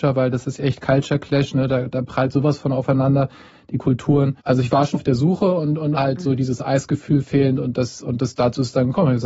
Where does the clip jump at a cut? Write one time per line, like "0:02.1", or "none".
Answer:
0:04.4
0:04.9
0:06.0